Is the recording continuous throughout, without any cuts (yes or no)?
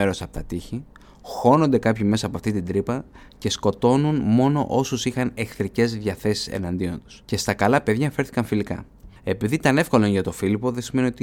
no